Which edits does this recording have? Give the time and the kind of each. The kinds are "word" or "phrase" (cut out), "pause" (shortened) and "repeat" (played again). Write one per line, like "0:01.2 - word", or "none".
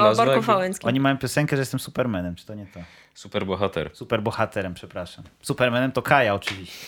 none